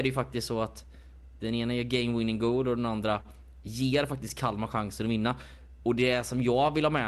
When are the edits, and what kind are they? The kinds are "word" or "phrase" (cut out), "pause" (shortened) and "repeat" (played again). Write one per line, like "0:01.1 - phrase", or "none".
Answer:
none